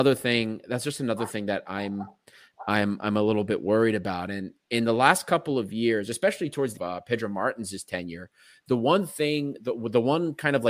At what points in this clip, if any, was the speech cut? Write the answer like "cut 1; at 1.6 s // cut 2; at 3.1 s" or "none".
cut 1; at 6.8 s